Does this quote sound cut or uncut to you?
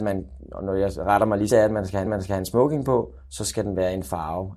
cut